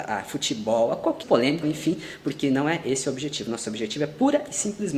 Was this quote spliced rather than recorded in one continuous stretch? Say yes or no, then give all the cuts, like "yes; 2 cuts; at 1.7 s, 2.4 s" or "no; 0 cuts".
yes; 2 cuts; at 1.2 s, 1.6 s